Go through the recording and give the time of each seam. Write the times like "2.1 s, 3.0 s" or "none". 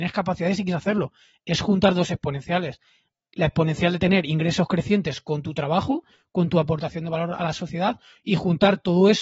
none